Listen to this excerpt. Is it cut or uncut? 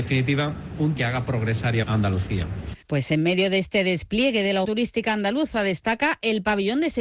cut